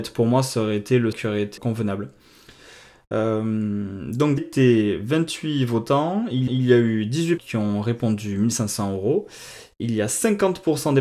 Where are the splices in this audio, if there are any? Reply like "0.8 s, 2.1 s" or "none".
1.1 s, 1.6 s, 4.4 s, 6.5 s, 7.4 s